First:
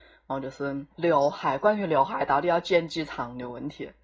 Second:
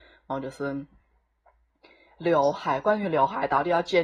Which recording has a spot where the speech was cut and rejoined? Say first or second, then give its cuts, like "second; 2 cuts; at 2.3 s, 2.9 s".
first; 1 cut; at 0.9 s